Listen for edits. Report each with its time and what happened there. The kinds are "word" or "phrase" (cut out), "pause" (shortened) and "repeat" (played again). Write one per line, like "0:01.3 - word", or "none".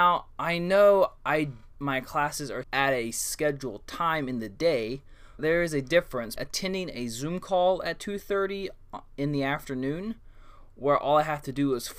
0:01.7 - phrase
0:02.6 - word
0:05.4 - word
0:06.4 - word